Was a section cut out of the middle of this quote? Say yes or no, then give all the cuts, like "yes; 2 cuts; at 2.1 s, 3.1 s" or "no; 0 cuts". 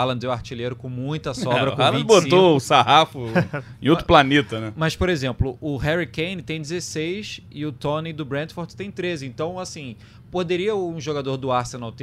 no; 0 cuts